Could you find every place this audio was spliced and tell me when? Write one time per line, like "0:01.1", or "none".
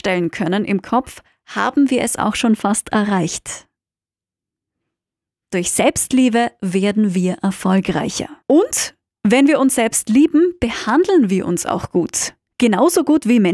0:08.4